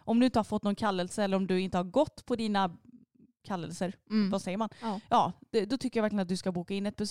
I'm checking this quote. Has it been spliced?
no; 0 cuts

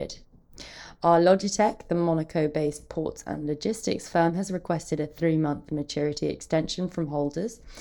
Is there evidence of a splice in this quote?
no; 0 cuts

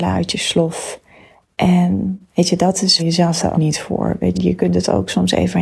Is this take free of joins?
no; 4 cuts; at 2.2 s, 3.0 s, 3.5 s, 4.3 s

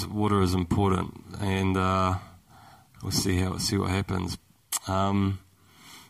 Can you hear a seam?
no; 0 cuts

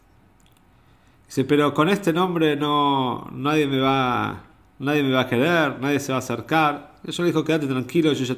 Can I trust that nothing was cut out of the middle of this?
yes; 0 cuts

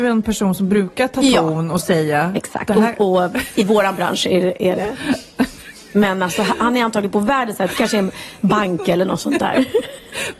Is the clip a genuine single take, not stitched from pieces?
yes; 0 cuts

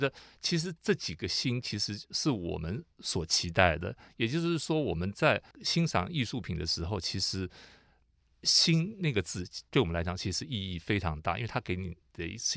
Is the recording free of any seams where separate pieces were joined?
no; 1 cut; at 5.5 s

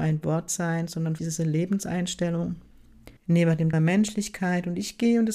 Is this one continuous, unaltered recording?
no; 3 cuts; at 1.2 s, 3.2 s, 3.7 s

